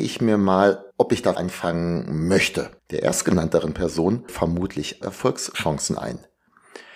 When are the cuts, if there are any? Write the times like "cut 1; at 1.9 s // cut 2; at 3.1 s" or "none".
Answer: cut 1; at 0.9 s // cut 2; at 1.4 s // cut 3; at 2.8 s // cut 4; at 4.3 s // cut 5; at 5.0 s